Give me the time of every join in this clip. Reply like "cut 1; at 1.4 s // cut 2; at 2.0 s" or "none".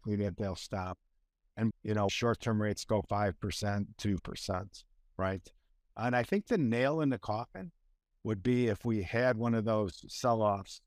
cut 1; at 1.7 s // cut 2; at 2.1 s // cut 3; at 3.1 s // cut 4; at 4.2 s